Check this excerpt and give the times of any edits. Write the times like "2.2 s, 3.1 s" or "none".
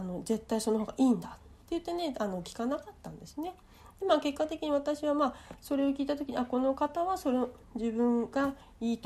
1.6 s, 7.6 s